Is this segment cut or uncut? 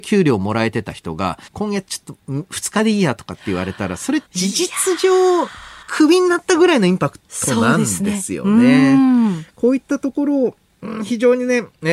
cut